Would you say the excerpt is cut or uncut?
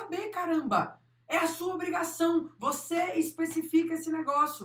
uncut